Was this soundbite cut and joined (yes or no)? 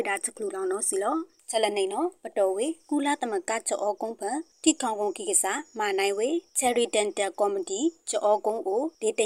no